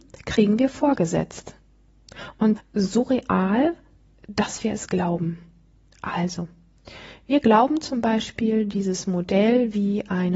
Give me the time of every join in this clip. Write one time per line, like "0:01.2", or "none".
0:02.5

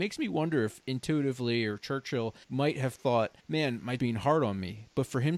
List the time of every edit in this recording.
0:02.4
0:03.4
0:04.0

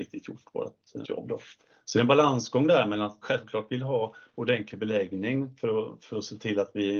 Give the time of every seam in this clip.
0:01.0
0:01.6
0:03.2

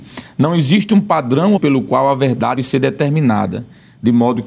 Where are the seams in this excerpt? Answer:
0:01.6
0:02.6

